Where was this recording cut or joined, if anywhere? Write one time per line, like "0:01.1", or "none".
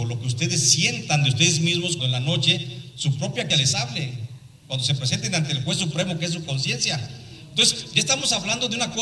0:02.0
0:03.5